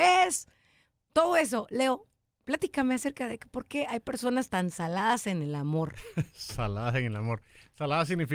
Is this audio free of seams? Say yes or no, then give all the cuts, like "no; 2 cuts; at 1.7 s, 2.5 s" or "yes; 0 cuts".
yes; 0 cuts